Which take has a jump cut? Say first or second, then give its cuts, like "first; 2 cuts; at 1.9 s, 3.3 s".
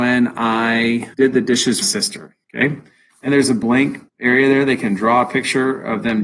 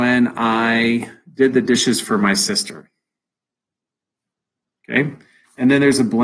first; 5 cuts; at 1.1 s, 1.8 s, 2.4 s, 3.3 s, 4.1 s